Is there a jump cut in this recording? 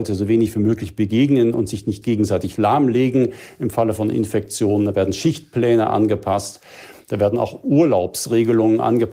yes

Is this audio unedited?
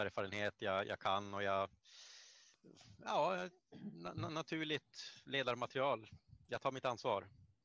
no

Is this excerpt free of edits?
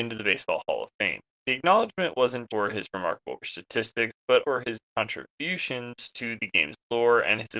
no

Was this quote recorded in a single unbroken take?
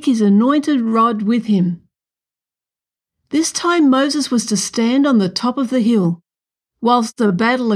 yes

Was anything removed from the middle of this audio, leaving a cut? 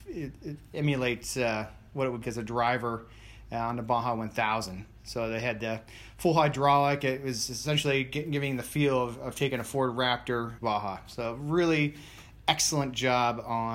yes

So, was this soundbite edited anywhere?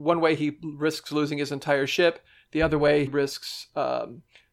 yes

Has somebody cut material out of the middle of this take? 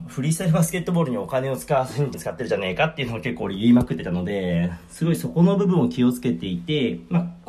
yes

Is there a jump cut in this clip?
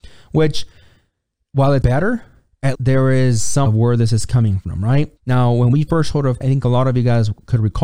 yes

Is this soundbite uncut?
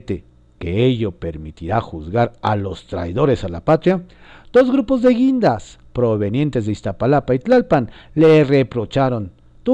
yes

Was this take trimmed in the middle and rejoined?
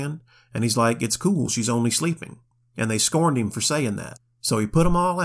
no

